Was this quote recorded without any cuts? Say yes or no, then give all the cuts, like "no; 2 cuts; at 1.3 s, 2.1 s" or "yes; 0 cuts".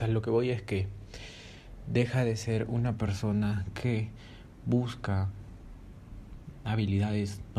yes; 0 cuts